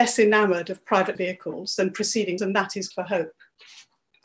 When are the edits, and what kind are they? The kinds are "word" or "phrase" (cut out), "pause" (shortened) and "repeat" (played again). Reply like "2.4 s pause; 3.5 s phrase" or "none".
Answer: 1.1 s word; 2.4 s word; 2.9 s word